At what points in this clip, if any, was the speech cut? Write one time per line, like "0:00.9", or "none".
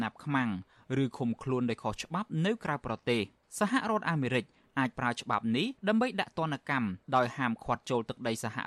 0:03.4
0:05.8
0:07.0